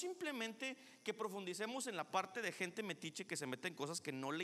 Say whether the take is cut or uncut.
uncut